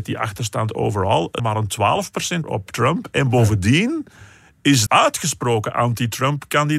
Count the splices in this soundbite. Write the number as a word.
three